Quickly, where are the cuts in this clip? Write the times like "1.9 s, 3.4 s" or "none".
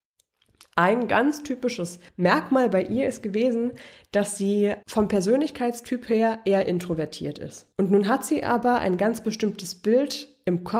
2.1 s, 4.8 s, 7.7 s